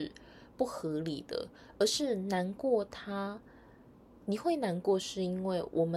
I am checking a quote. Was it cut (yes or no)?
no